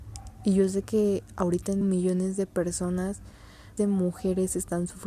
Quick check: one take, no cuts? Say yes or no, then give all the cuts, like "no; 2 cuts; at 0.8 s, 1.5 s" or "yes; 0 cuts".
no; 2 cuts; at 1.8 s, 3.8 s